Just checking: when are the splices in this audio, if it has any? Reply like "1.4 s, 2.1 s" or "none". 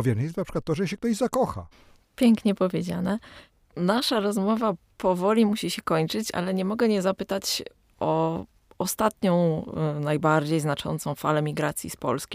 none